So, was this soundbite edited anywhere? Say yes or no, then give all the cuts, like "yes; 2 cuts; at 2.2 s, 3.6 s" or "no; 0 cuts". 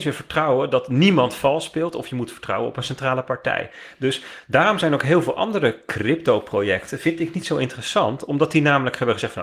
no; 0 cuts